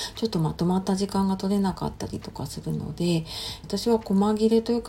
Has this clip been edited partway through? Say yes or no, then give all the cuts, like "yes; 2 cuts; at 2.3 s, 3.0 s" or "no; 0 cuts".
yes; 1 cut; at 3.6 s